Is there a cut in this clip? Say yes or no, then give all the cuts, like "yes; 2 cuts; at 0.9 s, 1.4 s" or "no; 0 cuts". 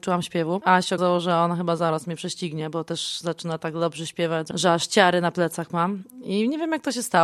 yes; 1 cut; at 1.0 s